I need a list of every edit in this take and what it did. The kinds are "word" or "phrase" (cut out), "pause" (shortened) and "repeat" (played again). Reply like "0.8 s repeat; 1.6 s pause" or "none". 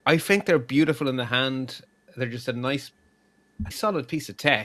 3.7 s word